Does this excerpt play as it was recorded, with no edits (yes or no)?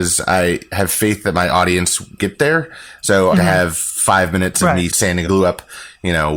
no